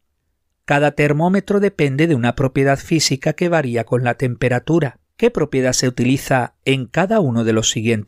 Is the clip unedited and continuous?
no; 1 cut; at 5.1 s

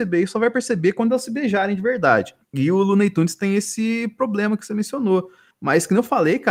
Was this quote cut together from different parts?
no; 0 cuts

